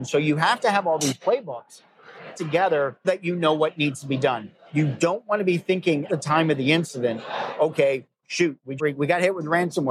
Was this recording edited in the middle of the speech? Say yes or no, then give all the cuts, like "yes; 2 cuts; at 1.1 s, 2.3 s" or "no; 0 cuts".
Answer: yes; 4 cuts; at 2.3 s, 3.0 s, 6.1 s, 8.8 s